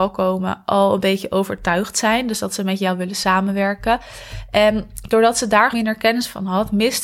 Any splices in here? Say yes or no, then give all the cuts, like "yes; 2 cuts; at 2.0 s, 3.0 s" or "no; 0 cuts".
yes; 1 cut; at 5.7 s